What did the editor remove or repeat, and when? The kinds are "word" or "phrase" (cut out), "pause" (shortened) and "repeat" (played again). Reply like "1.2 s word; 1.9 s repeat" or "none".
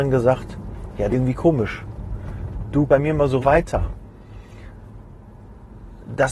1.1 s word; 2.9 s word; 3.4 s phrase